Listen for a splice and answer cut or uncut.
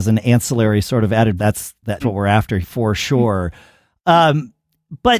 cut